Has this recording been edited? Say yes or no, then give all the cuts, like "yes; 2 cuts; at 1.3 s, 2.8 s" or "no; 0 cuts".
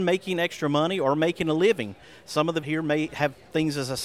yes; 1 cut; at 2.6 s